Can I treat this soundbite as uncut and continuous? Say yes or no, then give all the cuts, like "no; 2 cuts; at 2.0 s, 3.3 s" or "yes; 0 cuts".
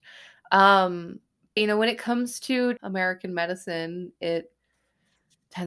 no; 2 cuts; at 1.6 s, 2.8 s